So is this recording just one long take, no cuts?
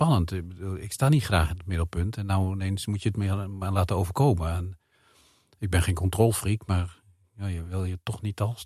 yes; 0 cuts

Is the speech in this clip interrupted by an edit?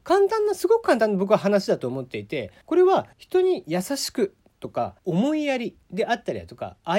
yes; 4 cuts; at 2.6 s, 3.1 s, 5.0 s, 5.8 s

